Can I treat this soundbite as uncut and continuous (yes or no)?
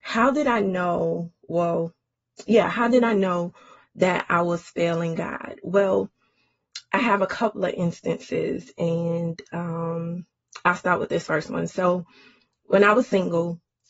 yes